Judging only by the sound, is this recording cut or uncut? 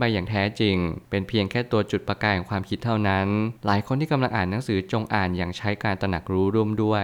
cut